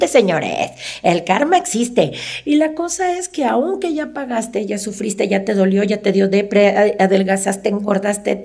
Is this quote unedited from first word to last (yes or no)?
yes